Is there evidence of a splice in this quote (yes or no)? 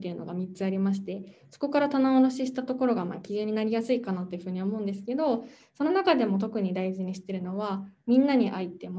no